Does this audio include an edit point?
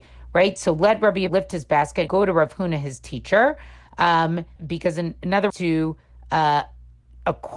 yes; 4 cuts; at 1.3 s, 2.1 s, 4.6 s, 5.5 s

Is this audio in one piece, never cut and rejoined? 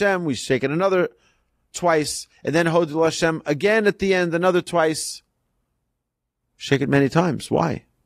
yes; 0 cuts

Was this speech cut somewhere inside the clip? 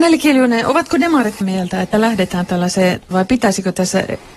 yes; 3 cuts; at 1.4 s, 1.9 s, 3.1 s

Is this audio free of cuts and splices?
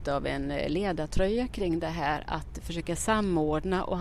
yes; 0 cuts

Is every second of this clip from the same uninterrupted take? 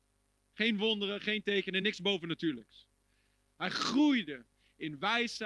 yes; 0 cuts

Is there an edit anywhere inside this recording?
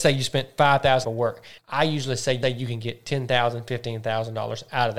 yes; 3 cuts; at 1.0 s, 1.6 s, 2.4 s

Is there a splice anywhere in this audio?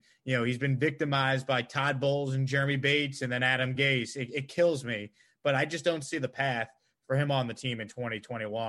no; 0 cuts

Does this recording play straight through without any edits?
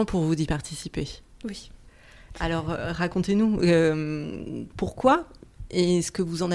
yes; 0 cuts

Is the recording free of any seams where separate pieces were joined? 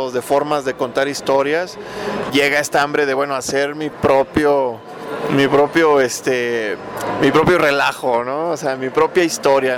no; 1 cut; at 2.3 s

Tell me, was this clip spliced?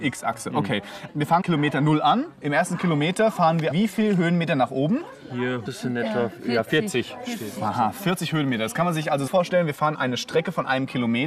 yes; 6 cuts; at 1.1 s, 1.4 s, 3.7 s, 5.7 s, 9.3 s, 9.9 s

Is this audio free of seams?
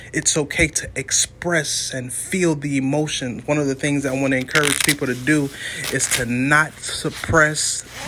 yes; 0 cuts

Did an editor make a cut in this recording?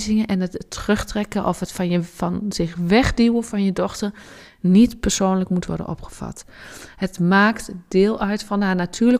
no; 0 cuts

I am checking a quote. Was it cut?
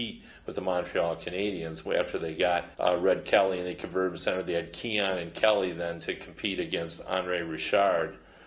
yes; 1 cut; at 2.7 s

